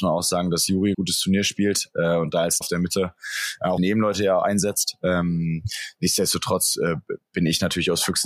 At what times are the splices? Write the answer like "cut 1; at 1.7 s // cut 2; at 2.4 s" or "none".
cut 1; at 0.9 s // cut 2; at 2.6 s // cut 3; at 3.8 s

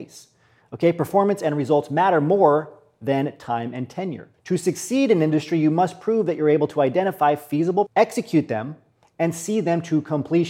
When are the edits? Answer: cut 1; at 4.3 s // cut 2; at 7.9 s

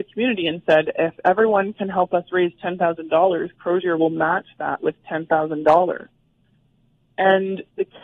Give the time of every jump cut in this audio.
none

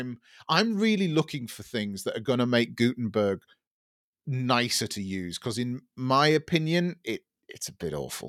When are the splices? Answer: none

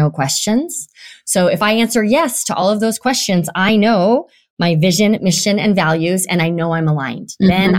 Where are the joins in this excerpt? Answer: none

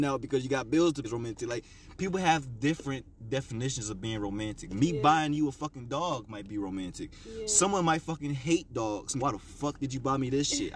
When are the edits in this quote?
cut 1; at 1.0 s // cut 2; at 9.2 s

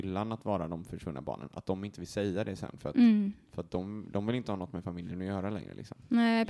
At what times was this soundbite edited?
none

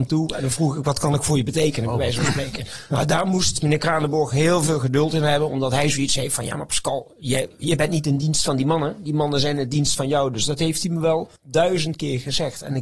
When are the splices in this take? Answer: cut 1; at 11.4 s

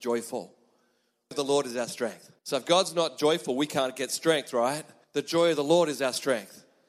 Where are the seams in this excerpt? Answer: cut 1; at 1.3 s // cut 2; at 2.4 s // cut 3; at 5.0 s

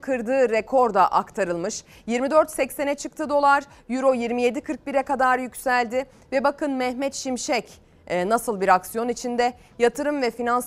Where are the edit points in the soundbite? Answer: none

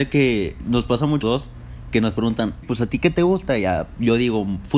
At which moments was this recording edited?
cut 1; at 1.2 s // cut 2; at 2.6 s

